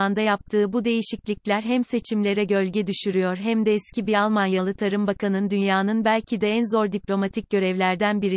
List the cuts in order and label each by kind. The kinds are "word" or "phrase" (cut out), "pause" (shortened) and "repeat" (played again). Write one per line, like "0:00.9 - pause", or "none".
none